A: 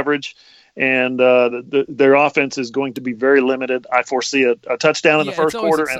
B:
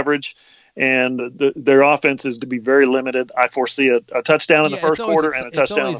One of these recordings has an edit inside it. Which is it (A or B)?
B